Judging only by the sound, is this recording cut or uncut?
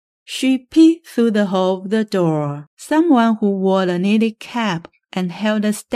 cut